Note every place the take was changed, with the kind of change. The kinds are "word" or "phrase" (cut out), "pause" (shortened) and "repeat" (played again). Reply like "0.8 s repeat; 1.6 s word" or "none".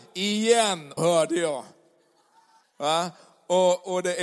1.0 s phrase; 2.6 s pause

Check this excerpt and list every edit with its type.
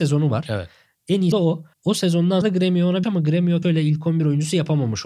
1.3 s word; 1.7 s pause; 2.4 s word; 3.0 s phrase; 3.6 s word

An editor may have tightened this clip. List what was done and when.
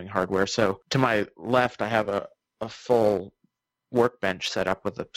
none

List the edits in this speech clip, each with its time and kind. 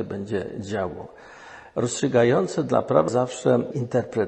3.1 s word

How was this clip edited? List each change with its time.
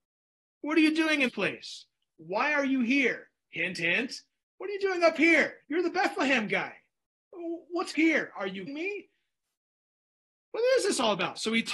1.3 s word; 4.4 s pause; 5.6 s pause; 7.9 s phrase; 8.7 s word

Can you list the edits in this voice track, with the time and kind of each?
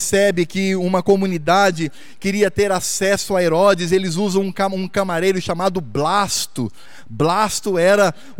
none

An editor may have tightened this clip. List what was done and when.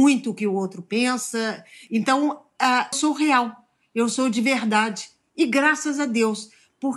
2.9 s word

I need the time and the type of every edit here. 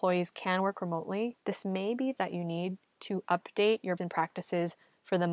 1.4 s pause; 2.2 s word; 4.0 s word

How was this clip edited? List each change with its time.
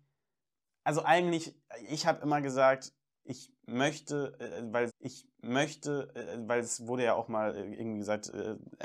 4.9 s repeat

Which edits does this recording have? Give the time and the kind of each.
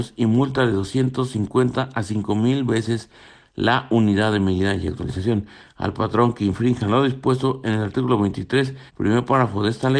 8.9 s pause

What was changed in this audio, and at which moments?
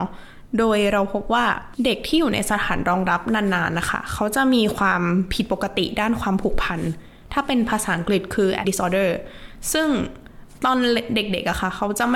8.6 s word

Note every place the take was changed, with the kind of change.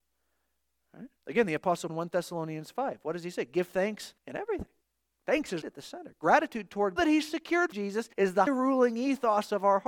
1.2 s pause; 1.9 s word; 4.2 s pause; 4.8 s pause; 5.6 s word; 7.0 s phrase; 7.7 s phrase; 8.1 s pause; 8.5 s word

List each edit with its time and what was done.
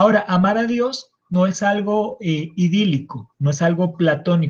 1.2 s pause

